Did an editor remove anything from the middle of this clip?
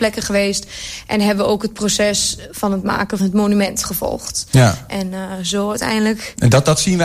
yes; 1 cut; at 3.2 s

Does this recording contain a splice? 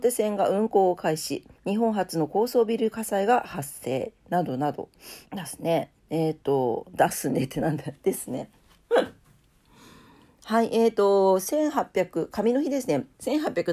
yes; 4 cuts; at 1.6 s, 5.3 s, 6.0 s, 9.2 s

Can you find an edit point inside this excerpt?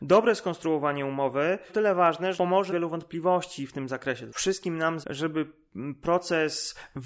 yes; 5 cuts; at 1.7 s, 2.3 s, 2.7 s, 4.3 s, 5.0 s

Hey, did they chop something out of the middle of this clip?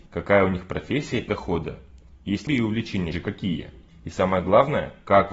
yes; 3 cuts; at 1.3 s, 2.5 s, 3.1 s

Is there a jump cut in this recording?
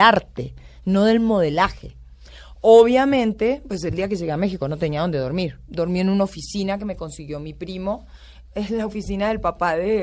no; 0 cuts

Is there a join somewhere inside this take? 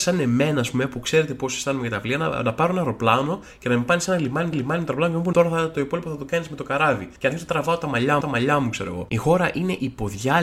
yes; 4 cuts; at 4.5 s, 5.3 s, 7.2 s, 8.2 s

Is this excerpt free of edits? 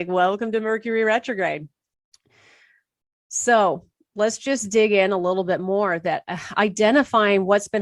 yes; 0 cuts

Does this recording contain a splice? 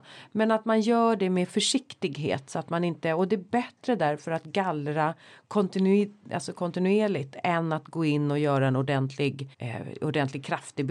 yes; 1 cut; at 9.5 s

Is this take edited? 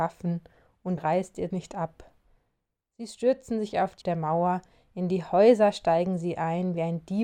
yes; 3 cuts; at 1.0 s, 1.5 s, 4.0 s

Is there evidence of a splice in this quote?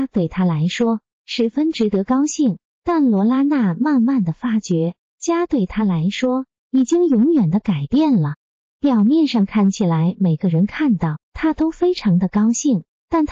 no; 0 cuts

